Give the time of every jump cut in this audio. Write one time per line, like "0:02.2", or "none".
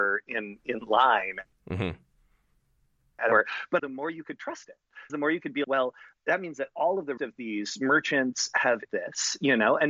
0:03.8
0:05.1
0:05.6
0:07.2
0:08.9